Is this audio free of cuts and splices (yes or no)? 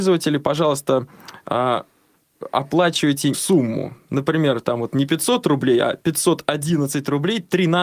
no